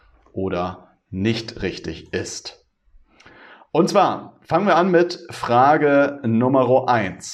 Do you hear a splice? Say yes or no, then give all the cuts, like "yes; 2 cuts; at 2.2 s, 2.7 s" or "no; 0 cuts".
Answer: no; 0 cuts